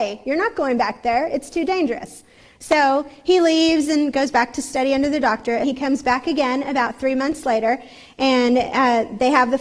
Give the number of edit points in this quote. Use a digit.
1